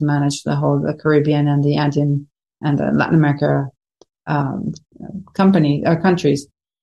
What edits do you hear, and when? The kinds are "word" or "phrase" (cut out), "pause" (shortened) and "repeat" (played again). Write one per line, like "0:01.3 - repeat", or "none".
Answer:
none